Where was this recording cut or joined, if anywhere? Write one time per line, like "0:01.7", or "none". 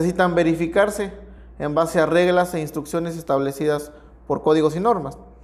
none